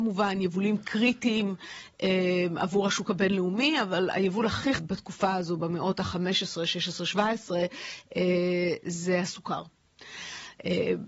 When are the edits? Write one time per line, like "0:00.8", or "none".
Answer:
0:04.8